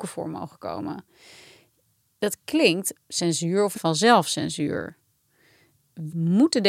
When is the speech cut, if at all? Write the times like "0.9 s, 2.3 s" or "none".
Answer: 2.9 s, 3.7 s

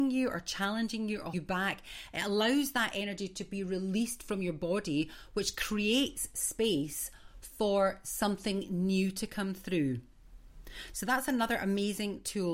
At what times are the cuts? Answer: 1.3 s

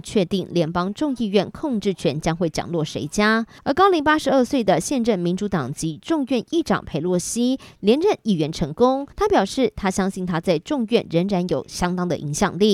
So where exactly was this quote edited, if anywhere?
9.1 s

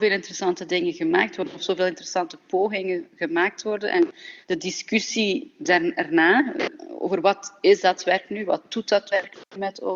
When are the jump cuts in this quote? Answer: 4.4 s

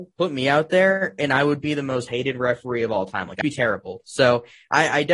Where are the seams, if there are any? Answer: 3.4 s

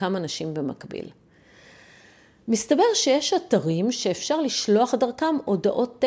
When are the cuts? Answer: none

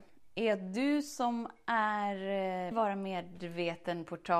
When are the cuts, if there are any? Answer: 2.7 s

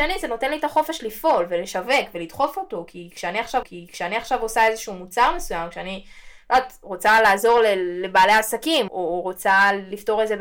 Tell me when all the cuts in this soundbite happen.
3.6 s, 8.9 s

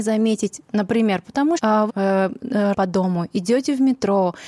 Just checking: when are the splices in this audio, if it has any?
1.6 s, 1.9 s, 2.7 s

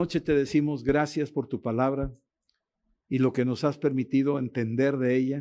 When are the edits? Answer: none

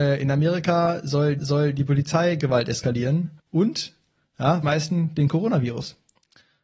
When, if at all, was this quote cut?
1.4 s, 3.4 s, 4.6 s

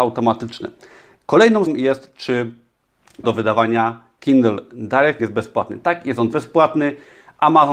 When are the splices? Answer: 1.7 s, 3.2 s, 4.2 s, 5.2 s, 6.3 s

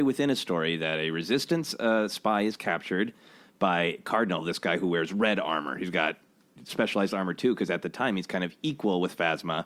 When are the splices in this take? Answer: none

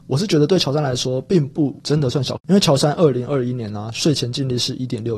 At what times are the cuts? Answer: 2.4 s

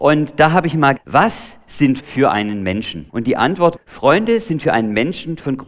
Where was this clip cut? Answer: 1.0 s, 2.0 s, 3.1 s, 3.8 s

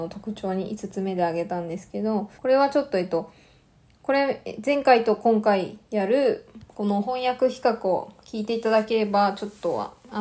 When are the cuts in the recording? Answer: 2.3 s

